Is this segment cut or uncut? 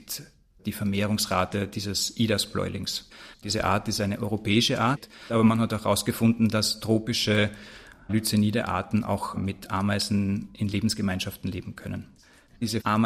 uncut